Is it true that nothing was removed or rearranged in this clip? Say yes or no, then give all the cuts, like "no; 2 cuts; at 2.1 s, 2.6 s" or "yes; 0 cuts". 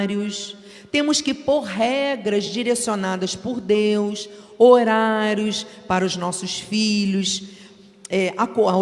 yes; 0 cuts